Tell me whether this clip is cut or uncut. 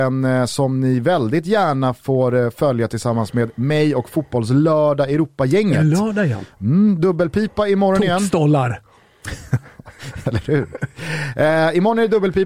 uncut